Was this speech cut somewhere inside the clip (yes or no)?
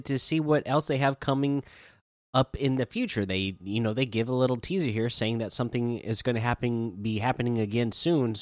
no